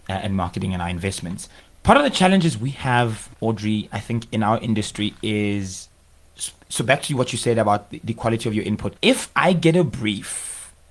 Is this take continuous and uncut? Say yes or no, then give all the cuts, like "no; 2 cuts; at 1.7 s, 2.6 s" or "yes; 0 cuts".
no; 2 cuts; at 3.3 s, 9.0 s